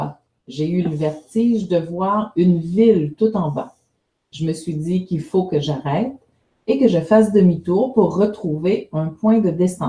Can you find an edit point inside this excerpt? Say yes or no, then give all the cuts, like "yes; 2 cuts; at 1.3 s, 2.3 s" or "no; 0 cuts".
no; 0 cuts